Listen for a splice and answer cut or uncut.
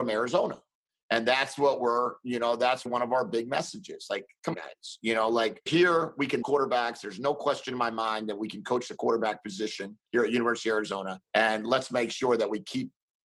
cut